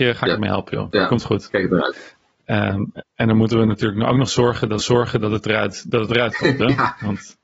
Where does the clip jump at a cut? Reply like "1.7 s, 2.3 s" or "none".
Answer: 3.1 s, 4.8 s